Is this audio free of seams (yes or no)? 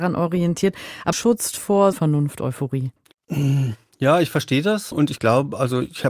no